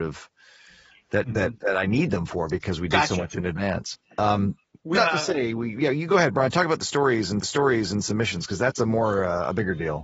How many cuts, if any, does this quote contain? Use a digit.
2